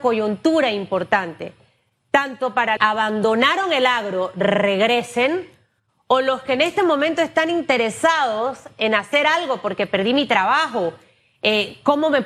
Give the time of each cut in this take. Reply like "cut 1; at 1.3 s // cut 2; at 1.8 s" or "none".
cut 1; at 2.8 s